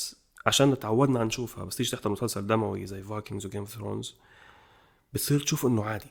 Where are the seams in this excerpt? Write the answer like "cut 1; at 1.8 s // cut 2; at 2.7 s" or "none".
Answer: none